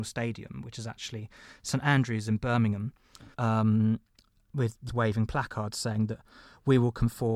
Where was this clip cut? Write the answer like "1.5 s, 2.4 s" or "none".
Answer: 3.3 s, 4.9 s